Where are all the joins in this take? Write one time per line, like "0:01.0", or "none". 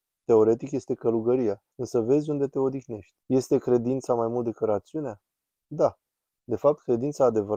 0:01.7
0:03.2